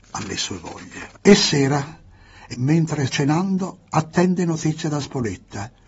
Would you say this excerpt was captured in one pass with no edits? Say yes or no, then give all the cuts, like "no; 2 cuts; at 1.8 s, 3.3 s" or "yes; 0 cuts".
no; 3 cuts; at 1.2 s, 2.5 s, 3.1 s